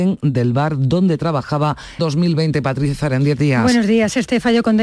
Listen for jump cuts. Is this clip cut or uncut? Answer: cut